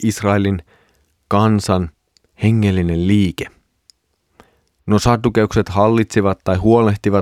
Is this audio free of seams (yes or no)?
yes